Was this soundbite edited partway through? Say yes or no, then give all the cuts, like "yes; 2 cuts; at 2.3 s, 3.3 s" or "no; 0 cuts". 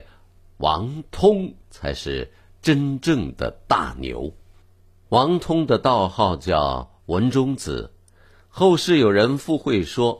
yes; 1 cut; at 1.6 s